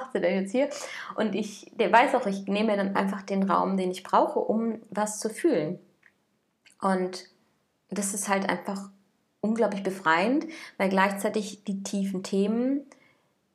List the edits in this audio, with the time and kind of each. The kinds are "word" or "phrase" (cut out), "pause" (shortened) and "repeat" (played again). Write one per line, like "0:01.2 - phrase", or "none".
none

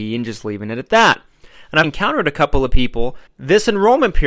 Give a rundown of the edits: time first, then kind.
0:01.8 - word
0:03.3 - pause

